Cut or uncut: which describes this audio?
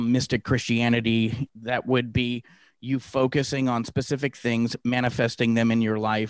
cut